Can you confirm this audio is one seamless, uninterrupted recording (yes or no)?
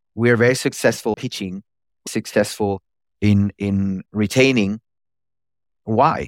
no